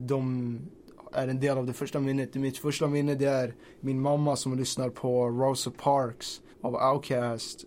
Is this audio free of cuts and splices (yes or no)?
no